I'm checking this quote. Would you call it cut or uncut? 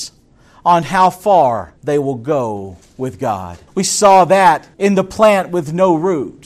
cut